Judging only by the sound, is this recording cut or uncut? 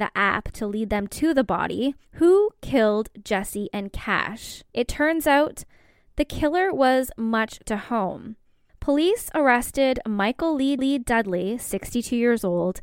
cut